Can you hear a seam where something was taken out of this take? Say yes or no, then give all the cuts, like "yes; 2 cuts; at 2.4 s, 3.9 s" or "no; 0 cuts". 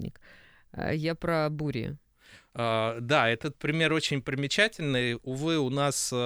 no; 0 cuts